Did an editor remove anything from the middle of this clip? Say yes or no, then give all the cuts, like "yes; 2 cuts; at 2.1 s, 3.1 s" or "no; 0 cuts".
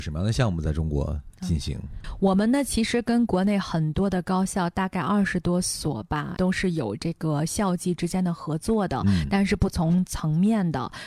yes; 1 cut; at 6.4 s